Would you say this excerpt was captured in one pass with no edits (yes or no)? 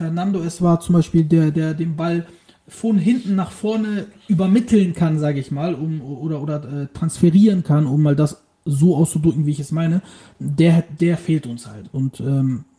yes